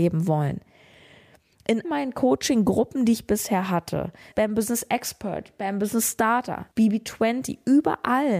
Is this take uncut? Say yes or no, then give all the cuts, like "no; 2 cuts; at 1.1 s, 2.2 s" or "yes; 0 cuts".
no; 3 cuts; at 1.8 s, 4.3 s, 6.7 s